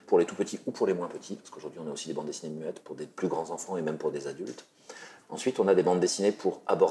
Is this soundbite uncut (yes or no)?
yes